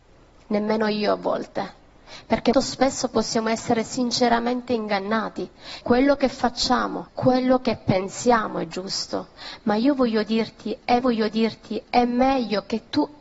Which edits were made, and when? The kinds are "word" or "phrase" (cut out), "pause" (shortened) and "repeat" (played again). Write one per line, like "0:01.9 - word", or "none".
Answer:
0:02.5 - word
0:05.8 - word
0:07.1 - phrase
0:11.0 - repeat